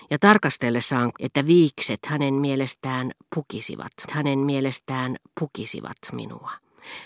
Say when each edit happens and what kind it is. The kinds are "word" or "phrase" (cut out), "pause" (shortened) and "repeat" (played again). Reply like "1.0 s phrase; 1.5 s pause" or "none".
1.1 s phrase; 4.1 s repeat